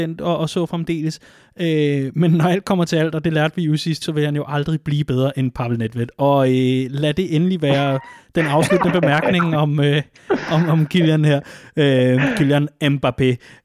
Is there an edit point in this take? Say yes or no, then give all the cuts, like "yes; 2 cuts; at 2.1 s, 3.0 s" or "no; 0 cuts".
yes; 1 cut; at 4.0 s